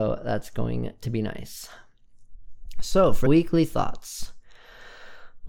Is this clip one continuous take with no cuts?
no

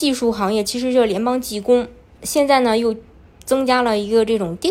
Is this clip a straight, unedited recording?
no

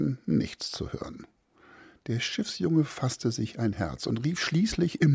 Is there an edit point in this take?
no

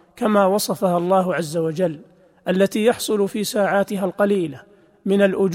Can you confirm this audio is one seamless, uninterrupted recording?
yes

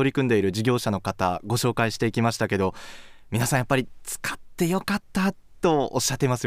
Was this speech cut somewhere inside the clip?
no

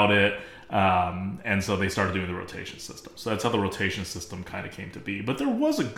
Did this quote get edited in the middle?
no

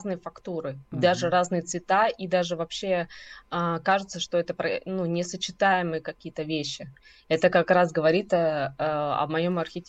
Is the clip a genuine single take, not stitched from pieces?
yes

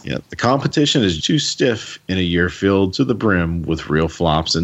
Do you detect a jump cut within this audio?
yes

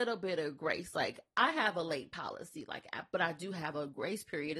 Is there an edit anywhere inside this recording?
no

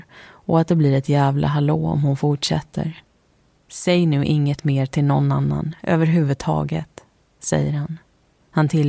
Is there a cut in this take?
no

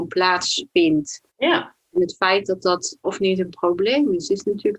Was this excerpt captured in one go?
no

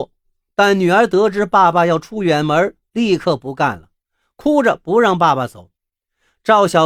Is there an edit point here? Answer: no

